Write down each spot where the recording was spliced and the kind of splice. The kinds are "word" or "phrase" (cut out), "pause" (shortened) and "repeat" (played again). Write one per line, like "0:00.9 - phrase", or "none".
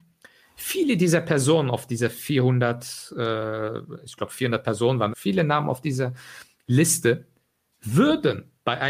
0:05.1 - word